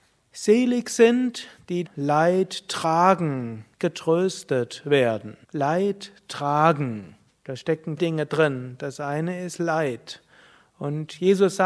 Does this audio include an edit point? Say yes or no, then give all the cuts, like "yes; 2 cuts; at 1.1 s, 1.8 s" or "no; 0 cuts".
yes; 5 cuts; at 1.8 s, 3.7 s, 5.4 s, 7.3 s, 8.0 s